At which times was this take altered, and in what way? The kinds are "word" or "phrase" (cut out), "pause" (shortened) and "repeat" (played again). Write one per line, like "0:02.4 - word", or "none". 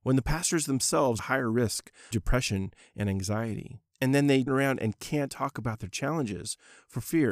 0:01.2 - phrase
0:02.1 - word
0:03.9 - pause
0:04.5 - word
0:05.3 - word